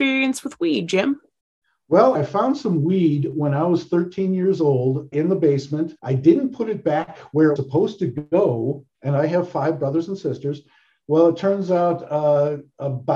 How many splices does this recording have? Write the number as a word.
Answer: four